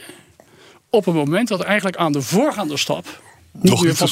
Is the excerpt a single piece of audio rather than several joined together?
yes; 0 cuts

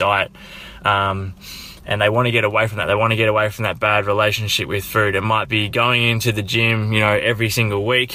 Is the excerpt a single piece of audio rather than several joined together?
yes; 0 cuts

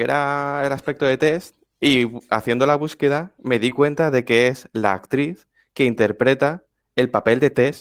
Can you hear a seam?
no; 0 cuts

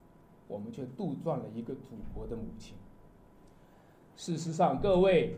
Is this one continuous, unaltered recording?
yes; 0 cuts

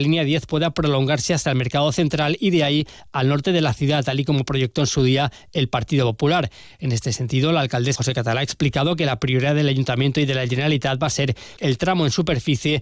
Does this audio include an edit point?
yes; 2 cuts; at 8.0 s, 11.6 s

